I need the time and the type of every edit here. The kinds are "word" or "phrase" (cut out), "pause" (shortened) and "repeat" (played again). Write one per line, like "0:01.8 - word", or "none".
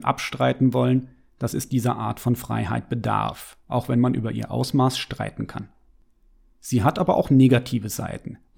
none